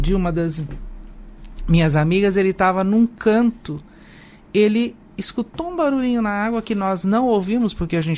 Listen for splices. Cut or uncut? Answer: uncut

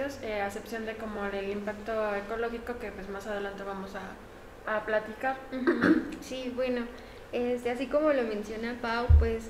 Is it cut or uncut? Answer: uncut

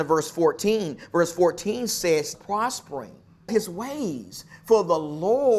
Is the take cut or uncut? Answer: cut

